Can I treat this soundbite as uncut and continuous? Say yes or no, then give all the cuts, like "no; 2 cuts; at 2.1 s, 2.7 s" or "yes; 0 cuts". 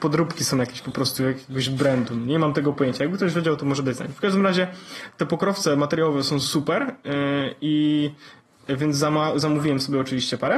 yes; 0 cuts